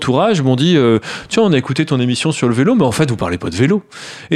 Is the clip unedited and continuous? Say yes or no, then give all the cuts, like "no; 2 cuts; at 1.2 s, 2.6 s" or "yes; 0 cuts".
yes; 0 cuts